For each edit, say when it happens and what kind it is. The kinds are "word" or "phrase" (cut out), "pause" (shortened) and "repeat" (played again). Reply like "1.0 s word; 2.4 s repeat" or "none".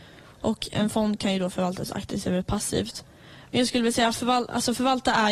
none